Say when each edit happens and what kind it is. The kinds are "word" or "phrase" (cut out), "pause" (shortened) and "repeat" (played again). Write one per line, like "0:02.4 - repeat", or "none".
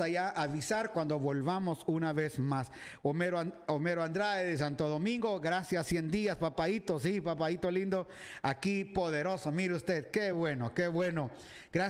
none